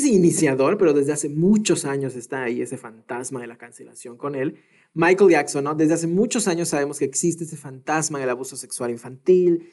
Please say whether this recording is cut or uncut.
uncut